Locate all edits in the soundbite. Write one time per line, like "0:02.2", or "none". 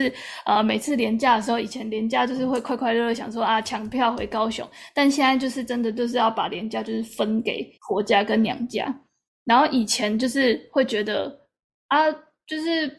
0:07.8